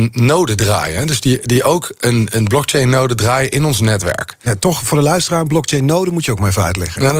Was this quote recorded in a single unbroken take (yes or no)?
yes